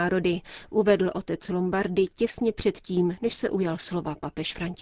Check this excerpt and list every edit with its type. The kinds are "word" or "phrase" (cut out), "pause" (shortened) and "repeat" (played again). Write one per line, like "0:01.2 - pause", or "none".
none